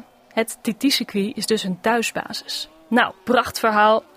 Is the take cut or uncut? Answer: cut